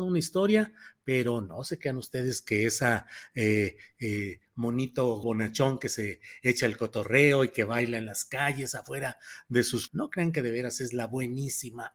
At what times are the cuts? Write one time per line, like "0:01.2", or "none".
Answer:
0:05.2
0:09.9